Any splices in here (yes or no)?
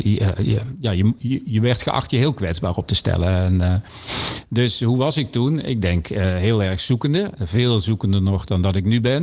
no